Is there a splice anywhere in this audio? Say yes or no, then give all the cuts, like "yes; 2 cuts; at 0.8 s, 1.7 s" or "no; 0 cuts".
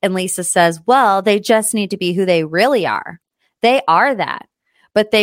no; 0 cuts